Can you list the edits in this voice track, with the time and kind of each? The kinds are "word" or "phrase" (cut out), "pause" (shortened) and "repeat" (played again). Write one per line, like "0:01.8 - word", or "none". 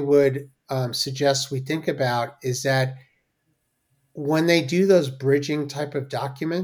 none